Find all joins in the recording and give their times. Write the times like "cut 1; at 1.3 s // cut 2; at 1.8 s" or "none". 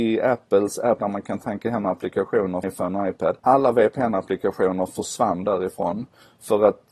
cut 1; at 1.0 s // cut 2; at 2.6 s // cut 3; at 3.4 s